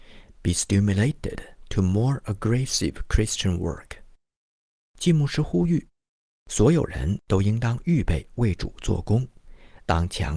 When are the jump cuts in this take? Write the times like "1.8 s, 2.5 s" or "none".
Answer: none